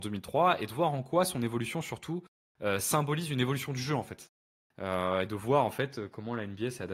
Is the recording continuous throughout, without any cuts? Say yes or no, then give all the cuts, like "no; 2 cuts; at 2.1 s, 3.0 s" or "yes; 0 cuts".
yes; 0 cuts